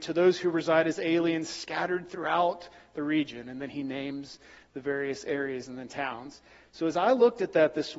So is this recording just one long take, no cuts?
yes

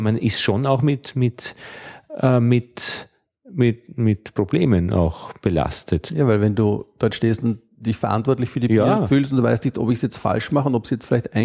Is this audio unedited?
yes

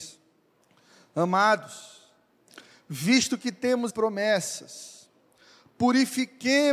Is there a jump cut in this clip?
yes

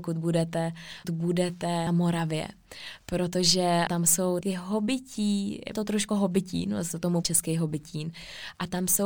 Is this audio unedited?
no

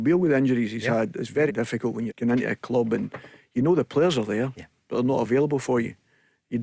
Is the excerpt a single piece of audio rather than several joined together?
no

